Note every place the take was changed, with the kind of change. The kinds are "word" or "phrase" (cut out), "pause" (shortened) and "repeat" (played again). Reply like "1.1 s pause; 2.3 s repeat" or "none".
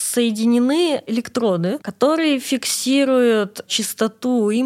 none

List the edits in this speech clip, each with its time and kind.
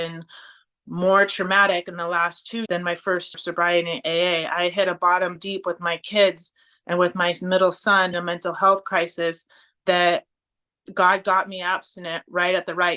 2.7 s word; 3.3 s word; 5.4 s word; 8.1 s word

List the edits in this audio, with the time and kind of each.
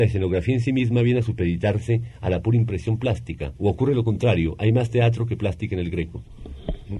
none

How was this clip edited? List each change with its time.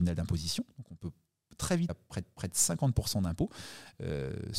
1.9 s word; 2.2 s repeat

